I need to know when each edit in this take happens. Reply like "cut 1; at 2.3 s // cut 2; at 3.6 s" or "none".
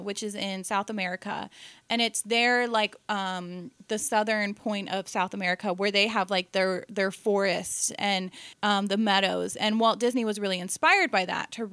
cut 1; at 8.5 s